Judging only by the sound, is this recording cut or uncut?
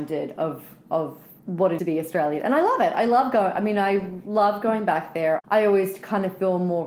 cut